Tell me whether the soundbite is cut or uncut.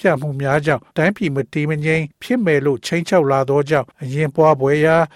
cut